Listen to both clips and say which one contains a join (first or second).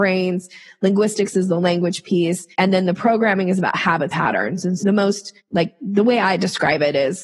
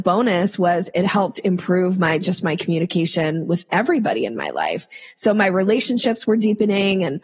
first